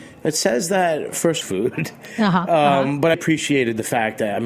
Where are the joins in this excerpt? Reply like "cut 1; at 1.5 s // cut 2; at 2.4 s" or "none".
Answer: cut 1; at 1.4 s // cut 2; at 3.1 s